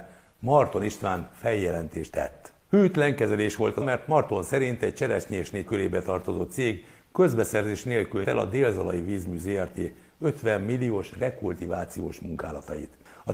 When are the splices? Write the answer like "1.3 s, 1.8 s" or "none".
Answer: 2.1 s, 3.8 s, 5.7 s, 8.2 s